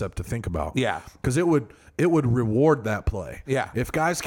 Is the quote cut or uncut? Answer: uncut